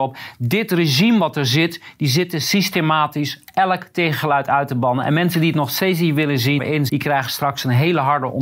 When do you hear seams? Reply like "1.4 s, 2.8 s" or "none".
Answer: 6.6 s, 6.9 s